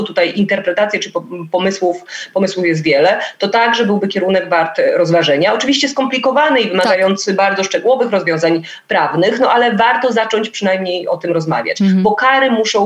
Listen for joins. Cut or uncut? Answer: uncut